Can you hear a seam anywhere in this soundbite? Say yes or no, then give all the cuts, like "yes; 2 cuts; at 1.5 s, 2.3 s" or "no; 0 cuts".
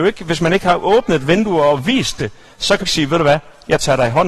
yes; 1 cut; at 2.8 s